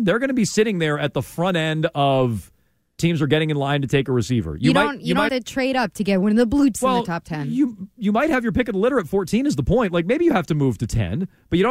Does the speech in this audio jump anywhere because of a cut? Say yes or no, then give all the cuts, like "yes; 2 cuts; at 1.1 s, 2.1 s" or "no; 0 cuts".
yes; 3 cuts; at 3.0 s, 5.3 s, 6.7 s